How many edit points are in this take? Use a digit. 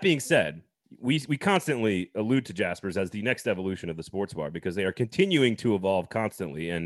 0